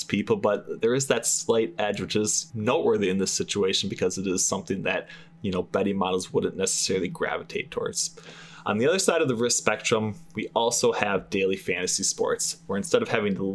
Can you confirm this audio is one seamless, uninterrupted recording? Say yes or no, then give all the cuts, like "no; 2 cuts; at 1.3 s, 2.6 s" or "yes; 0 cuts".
no; 1 cut; at 2.5 s